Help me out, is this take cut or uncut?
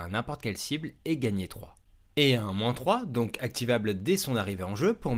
uncut